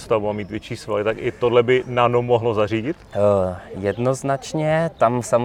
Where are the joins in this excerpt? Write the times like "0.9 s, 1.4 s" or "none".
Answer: 3.1 s